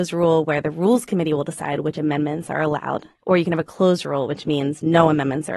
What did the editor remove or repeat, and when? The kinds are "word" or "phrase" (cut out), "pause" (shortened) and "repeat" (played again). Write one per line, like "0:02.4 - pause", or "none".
0:03.1 - pause